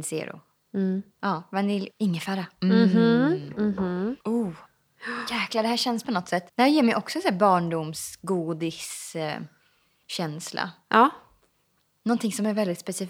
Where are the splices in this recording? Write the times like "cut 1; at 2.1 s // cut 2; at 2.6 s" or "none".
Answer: cut 1; at 1.9 s // cut 2; at 4.2 s // cut 3; at 6.0 s // cut 4; at 6.5 s